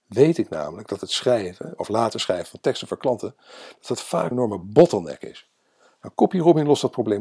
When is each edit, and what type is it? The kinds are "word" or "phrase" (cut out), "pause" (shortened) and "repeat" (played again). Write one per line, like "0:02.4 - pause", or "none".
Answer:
0:04.3 - word